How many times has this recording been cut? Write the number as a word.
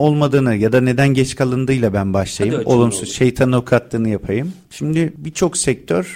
zero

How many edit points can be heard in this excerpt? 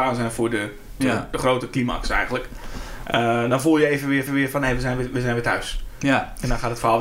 two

